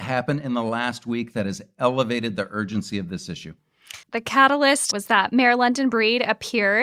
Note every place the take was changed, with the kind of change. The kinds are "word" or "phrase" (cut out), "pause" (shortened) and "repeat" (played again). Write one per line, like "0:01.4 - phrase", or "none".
0:04.0 - pause